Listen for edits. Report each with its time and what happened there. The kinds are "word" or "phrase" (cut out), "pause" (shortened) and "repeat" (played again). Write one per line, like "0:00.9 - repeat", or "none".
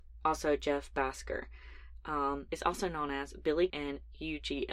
0:02.5 - word
0:03.7 - word